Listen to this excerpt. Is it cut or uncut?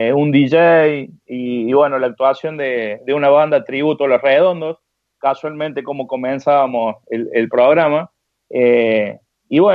uncut